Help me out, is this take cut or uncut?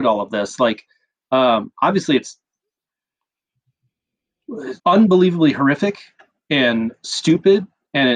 cut